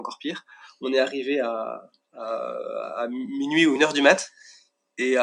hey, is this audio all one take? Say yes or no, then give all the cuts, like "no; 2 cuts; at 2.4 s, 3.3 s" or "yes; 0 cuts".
yes; 0 cuts